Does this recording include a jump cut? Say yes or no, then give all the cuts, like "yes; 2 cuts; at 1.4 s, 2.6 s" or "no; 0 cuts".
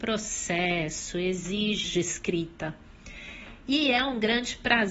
yes; 1 cut; at 1.8 s